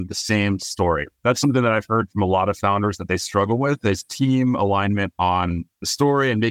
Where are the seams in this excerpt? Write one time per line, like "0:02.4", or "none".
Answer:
none